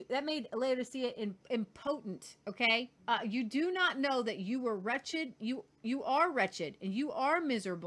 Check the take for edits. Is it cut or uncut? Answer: cut